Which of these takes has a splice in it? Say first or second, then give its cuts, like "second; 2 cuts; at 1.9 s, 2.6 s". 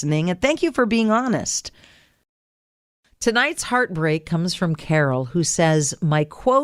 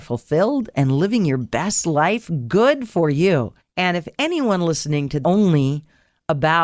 second; 2 cuts; at 3.6 s, 5.2 s